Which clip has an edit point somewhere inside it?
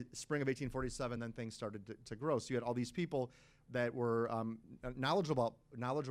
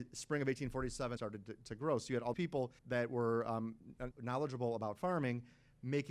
second; 4 cuts; at 1.2 s, 2.3 s, 2.8 s, 4.1 s

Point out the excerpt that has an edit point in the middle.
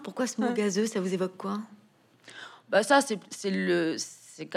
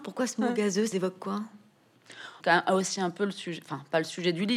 second; 2 cuts; at 0.9 s, 2.4 s

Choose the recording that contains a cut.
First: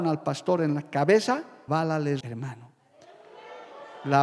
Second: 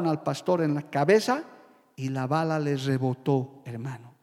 first; 2 cuts; at 1.7 s, 2.2 s

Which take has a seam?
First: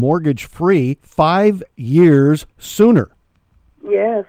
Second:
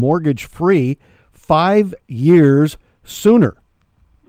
first; 2 cuts; at 1.0 s, 2.5 s

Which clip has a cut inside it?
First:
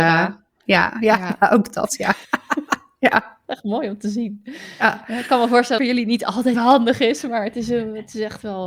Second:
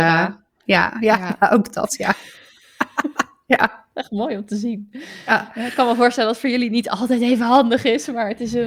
first; 3 cuts; at 2.2 s, 5.8 s, 6.5 s

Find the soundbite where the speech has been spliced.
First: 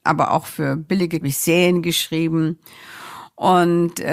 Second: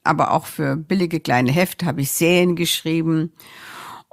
first; 1 cut; at 1.2 s

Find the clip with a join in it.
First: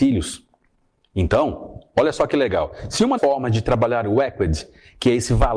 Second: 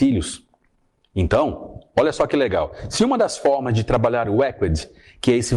first; 1 cut; at 3.2 s

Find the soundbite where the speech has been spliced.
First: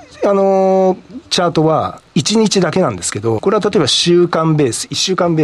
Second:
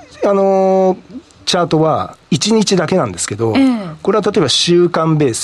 first; 2 cuts; at 1.2 s, 3.4 s

